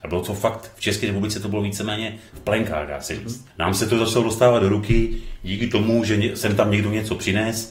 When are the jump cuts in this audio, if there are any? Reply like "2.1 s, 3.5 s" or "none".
3.5 s